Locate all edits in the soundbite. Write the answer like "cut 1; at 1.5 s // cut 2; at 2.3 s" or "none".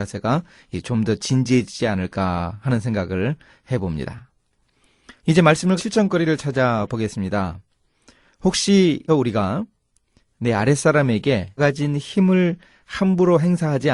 cut 1; at 5.2 s // cut 2; at 5.8 s // cut 3; at 9.1 s // cut 4; at 11.6 s